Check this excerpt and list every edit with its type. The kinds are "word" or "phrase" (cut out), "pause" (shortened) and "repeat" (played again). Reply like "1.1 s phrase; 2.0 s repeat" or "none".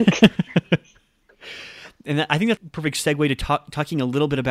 2.6 s word